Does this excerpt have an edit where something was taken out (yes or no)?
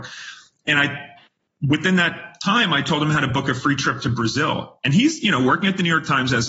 no